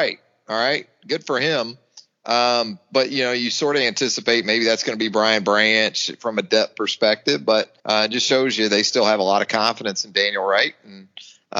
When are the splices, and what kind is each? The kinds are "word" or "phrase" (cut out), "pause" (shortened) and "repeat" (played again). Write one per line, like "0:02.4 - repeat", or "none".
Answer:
0:07.8 - pause